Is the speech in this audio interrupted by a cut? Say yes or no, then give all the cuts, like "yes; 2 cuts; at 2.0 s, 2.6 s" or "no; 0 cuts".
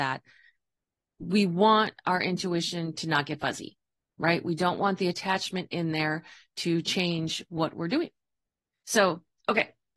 no; 0 cuts